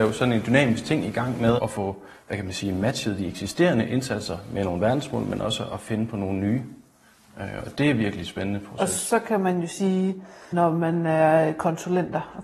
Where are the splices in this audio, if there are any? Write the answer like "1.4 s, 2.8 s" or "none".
none